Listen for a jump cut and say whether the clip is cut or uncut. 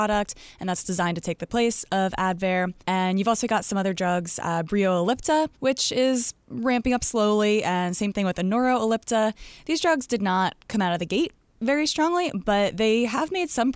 cut